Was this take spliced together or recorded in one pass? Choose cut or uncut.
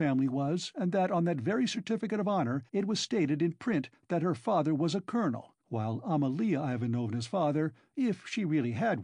cut